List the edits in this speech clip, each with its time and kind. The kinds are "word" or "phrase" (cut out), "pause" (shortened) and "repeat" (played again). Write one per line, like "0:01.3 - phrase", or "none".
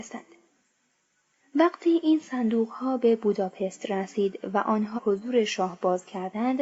0:05.0 - phrase